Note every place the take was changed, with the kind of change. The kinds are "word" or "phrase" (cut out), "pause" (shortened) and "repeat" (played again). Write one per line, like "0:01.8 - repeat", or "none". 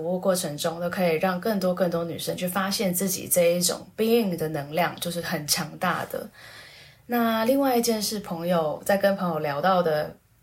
none